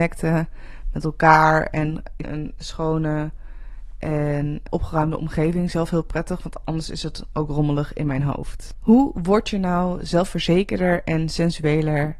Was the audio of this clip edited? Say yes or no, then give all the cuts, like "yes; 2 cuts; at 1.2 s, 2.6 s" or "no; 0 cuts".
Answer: yes; 2 cuts; at 2.2 s, 4.7 s